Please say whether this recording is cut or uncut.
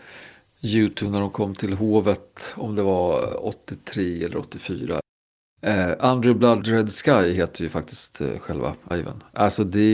cut